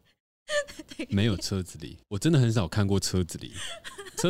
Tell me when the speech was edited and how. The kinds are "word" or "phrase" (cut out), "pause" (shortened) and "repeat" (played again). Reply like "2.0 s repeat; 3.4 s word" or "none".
2.0 s pause